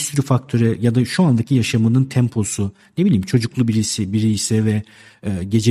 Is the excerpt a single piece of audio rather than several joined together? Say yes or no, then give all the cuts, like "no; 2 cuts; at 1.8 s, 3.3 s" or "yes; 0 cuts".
yes; 0 cuts